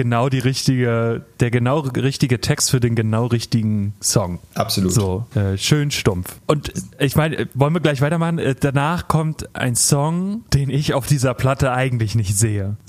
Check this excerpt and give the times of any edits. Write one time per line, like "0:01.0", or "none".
none